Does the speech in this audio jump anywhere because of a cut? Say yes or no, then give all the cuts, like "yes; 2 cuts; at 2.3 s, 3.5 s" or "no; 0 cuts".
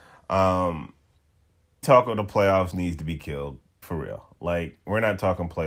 yes; 3 cuts; at 1.8 s, 2.7 s, 3.8 s